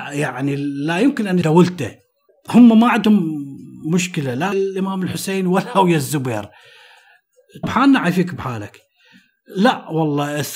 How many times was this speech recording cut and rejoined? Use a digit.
4